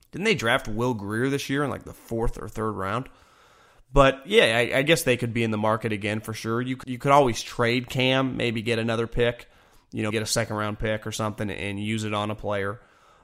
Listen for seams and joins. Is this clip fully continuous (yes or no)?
no